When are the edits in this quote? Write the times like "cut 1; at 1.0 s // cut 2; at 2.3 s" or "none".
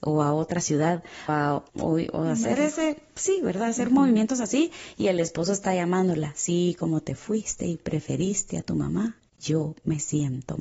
cut 1; at 1.3 s // cut 2; at 1.7 s